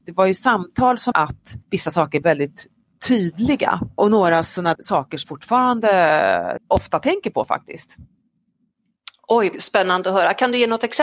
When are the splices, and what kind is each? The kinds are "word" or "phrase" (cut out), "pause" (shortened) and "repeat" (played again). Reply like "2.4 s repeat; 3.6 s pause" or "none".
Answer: 1.1 s word; 1.6 s pause; 2.2 s word; 4.7 s word; 5.2 s word; 6.6 s word; 9.5 s word